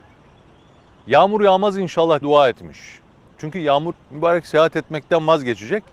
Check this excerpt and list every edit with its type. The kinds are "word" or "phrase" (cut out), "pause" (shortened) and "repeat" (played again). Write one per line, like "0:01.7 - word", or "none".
0:02.2 - word
0:03.9 - word